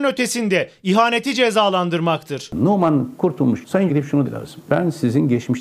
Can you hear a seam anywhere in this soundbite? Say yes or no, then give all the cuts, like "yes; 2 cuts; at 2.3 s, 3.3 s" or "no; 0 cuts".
yes; 2 cuts; at 3.9 s, 4.2 s